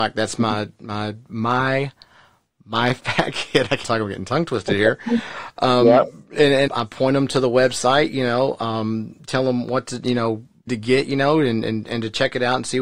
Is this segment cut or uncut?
cut